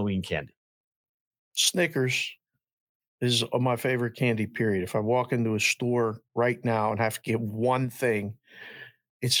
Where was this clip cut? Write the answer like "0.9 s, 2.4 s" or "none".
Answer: none

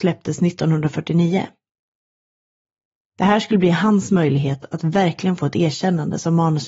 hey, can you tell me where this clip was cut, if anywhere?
none

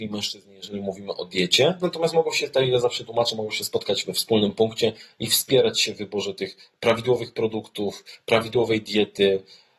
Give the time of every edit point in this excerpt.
none

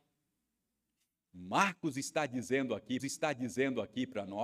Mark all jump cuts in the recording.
3.0 s

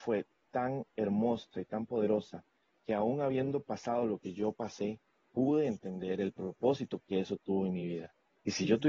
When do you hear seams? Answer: none

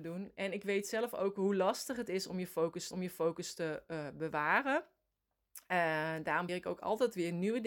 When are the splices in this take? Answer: 2.9 s, 6.5 s

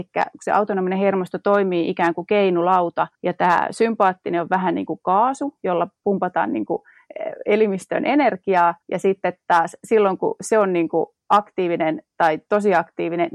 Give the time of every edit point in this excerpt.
3.1 s, 8.8 s

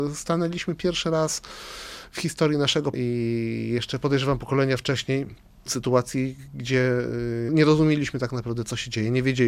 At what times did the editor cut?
2.9 s, 5.7 s, 7.5 s

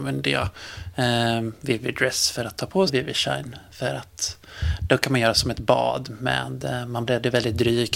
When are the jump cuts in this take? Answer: 2.9 s, 7.1 s

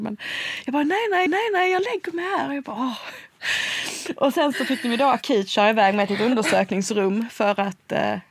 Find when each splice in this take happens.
1.3 s

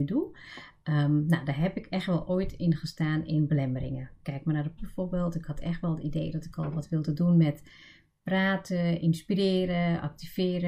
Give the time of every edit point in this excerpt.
4.8 s

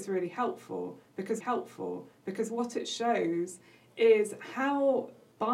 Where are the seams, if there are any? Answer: 1.4 s

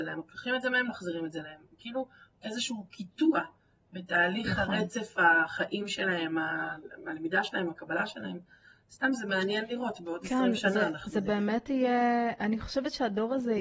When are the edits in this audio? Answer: 2.4 s

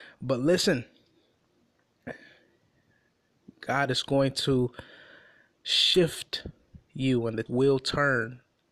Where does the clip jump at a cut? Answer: 6.8 s, 7.5 s

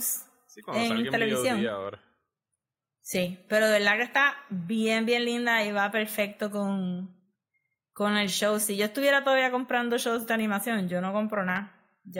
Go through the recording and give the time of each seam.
none

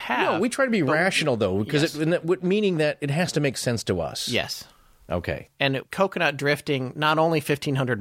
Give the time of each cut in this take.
none

